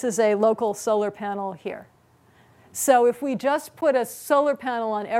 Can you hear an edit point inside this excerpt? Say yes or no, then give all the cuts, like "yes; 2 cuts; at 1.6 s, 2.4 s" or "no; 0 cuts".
no; 0 cuts